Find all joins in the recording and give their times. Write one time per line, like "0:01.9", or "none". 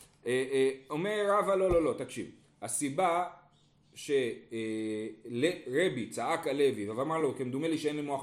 none